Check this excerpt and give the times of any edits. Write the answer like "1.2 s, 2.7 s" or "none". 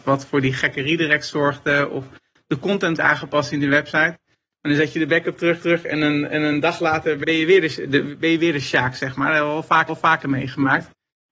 3.0 s, 5.6 s, 7.2 s, 9.9 s